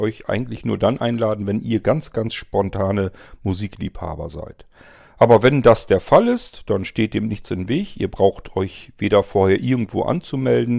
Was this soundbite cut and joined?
no; 0 cuts

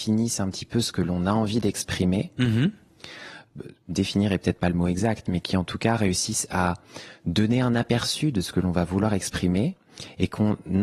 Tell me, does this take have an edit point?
no; 0 cuts

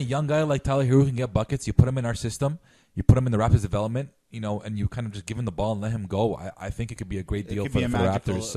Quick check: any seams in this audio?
no; 0 cuts

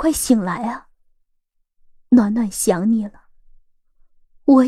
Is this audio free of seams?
yes; 0 cuts

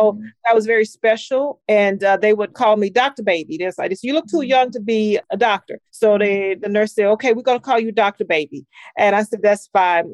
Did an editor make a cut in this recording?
yes; 1 cut; at 5.9 s

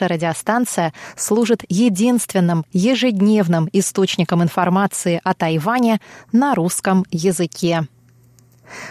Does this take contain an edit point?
no; 0 cuts

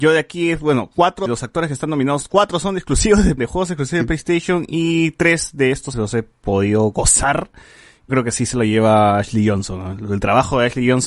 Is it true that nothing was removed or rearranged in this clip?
no; 4 cuts; at 1.3 s, 3.4 s, 5.9 s, 8.1 s

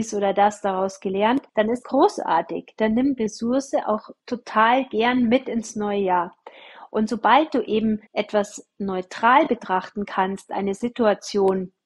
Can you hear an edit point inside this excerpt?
yes; 5 cuts; at 1.5 s, 1.8 s, 3.2 s, 4.2 s, 8.1 s

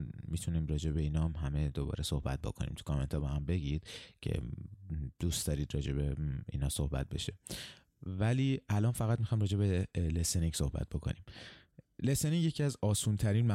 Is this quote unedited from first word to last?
yes; 0 cuts

